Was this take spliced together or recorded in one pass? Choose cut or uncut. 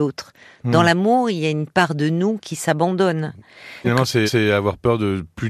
cut